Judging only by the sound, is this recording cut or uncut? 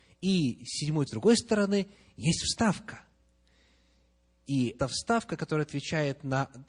cut